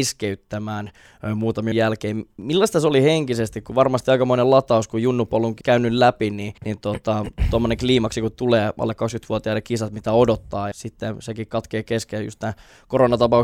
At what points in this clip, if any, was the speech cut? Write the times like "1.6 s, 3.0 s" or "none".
1.7 s, 5.6 s, 6.6 s, 10.7 s